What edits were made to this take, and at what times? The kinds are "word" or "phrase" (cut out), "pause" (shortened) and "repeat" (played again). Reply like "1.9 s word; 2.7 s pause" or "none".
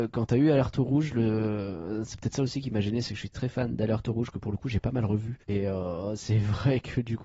3.3 s word; 5.4 s pause